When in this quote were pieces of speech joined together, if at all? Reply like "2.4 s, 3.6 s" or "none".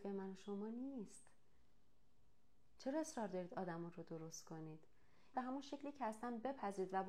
5.3 s

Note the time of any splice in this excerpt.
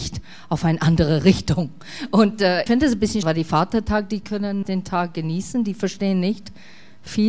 2.7 s, 3.2 s, 4.6 s

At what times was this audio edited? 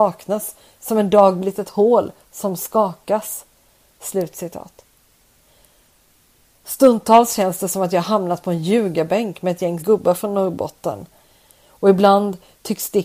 9.8 s

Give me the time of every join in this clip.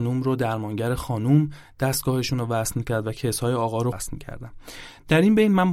3.9 s

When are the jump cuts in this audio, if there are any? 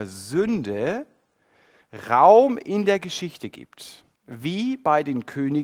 4.1 s

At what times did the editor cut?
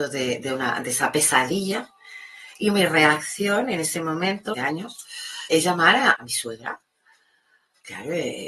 4.5 s, 5.5 s, 6.1 s

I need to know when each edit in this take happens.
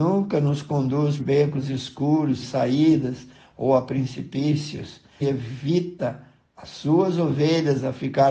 1.2 s, 2.4 s, 5.2 s

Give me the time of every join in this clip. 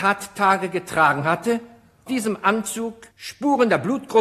2.1 s, 3.1 s

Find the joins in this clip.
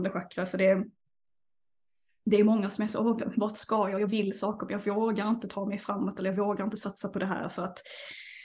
none

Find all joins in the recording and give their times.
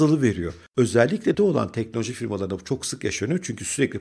1.3 s

